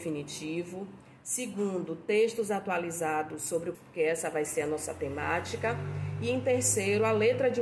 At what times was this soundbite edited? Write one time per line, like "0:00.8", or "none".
0:03.7